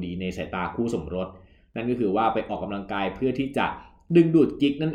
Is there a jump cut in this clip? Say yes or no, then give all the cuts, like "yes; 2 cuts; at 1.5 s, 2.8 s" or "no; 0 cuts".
no; 0 cuts